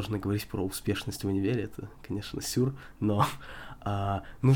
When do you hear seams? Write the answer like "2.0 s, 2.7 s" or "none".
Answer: none